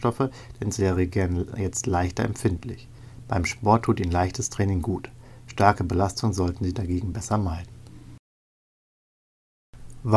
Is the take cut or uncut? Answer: uncut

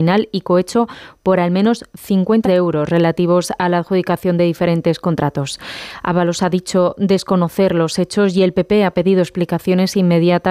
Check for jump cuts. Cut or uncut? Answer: cut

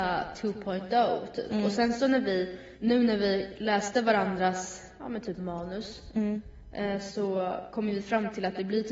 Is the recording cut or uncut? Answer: cut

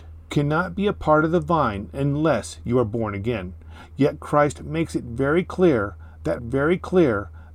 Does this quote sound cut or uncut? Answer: cut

